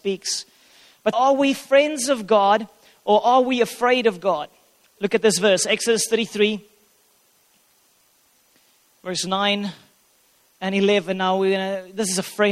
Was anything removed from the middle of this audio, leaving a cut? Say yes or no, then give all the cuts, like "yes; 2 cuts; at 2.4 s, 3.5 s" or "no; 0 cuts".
yes; 1 cut; at 1.1 s